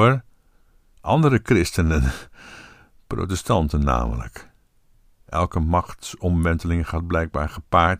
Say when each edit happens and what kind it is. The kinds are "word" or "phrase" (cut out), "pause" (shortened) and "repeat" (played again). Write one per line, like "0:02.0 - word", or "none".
none